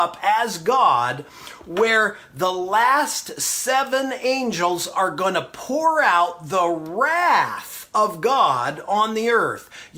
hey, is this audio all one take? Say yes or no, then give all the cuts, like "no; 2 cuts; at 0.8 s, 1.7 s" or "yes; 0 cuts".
yes; 0 cuts